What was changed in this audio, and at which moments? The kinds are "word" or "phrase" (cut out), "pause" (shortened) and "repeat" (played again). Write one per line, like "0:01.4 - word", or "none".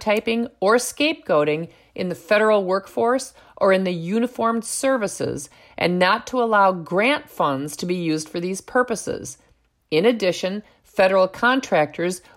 none